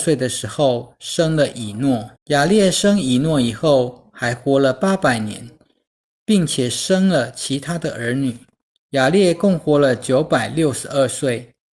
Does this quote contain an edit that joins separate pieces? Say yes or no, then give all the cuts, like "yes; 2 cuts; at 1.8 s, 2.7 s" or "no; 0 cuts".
yes; 2 cuts; at 2.2 s, 8.7 s